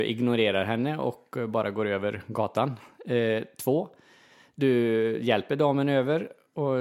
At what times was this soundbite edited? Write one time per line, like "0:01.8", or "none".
none